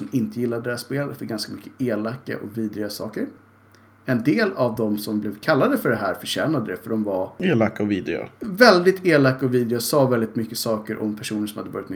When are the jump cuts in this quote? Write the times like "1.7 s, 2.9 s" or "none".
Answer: none